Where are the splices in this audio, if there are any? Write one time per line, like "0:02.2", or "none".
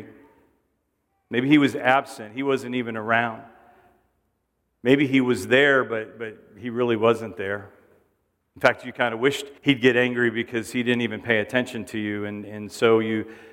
0:09.6